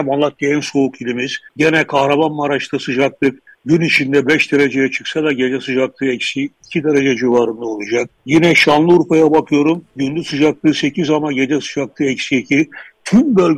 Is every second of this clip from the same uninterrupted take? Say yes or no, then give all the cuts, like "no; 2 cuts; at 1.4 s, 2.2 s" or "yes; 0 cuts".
no; 4 cuts; at 1.5 s, 3.5 s, 8.2 s, 9.9 s